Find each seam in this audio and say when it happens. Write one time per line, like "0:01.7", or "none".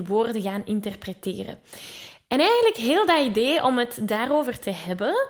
none